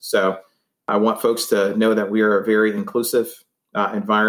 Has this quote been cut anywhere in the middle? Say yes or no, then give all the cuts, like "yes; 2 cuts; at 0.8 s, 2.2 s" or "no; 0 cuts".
no; 0 cuts